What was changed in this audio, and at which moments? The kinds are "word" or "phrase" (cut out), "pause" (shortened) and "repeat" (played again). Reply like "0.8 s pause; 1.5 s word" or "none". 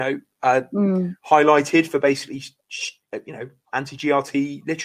3.6 s word

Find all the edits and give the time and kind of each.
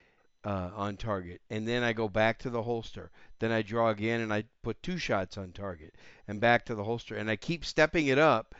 none

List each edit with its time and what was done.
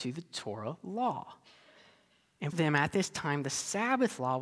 2.5 s word

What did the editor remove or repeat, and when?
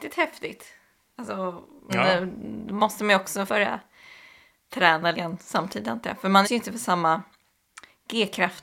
1.9 s word; 3.5 s word; 5.1 s word; 6.4 s word

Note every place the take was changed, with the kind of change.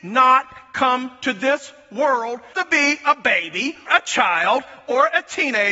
2.5 s word; 3.9 s word

